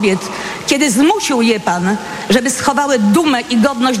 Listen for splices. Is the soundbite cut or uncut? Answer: uncut